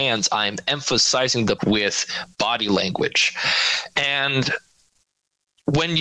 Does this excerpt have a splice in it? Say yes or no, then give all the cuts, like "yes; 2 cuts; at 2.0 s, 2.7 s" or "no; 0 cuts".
yes; 1 cut; at 1.6 s